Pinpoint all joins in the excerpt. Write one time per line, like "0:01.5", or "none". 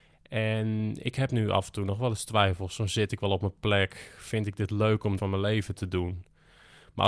0:05.2